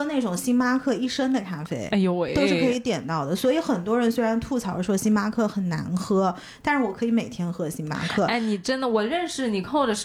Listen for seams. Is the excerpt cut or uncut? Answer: uncut